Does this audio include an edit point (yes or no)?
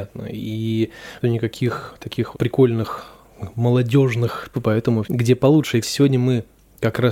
yes